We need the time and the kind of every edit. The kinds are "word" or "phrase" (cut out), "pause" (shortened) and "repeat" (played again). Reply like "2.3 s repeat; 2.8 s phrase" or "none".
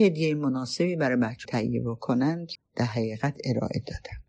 1.4 s word; 2.5 s word